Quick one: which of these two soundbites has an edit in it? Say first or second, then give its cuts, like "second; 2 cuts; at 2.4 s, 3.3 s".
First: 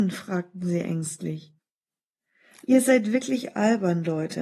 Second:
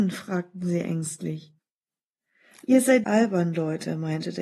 second; 1 cut; at 3.0 s